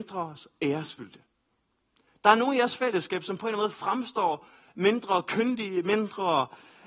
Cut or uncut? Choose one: uncut